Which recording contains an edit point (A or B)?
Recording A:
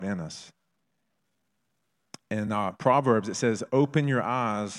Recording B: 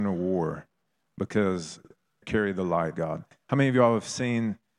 B